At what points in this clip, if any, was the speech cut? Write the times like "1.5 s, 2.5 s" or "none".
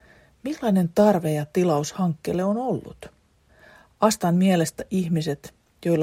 none